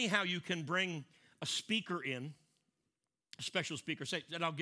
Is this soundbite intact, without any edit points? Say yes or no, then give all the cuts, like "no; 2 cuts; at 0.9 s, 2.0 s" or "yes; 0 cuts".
yes; 0 cuts